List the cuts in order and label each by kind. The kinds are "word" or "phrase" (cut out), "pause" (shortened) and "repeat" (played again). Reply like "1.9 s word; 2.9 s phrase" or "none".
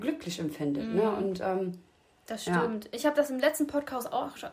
none